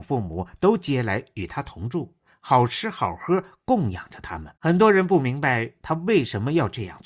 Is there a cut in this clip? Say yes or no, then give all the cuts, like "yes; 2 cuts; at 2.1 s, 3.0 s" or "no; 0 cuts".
yes; 1 cut; at 4.6 s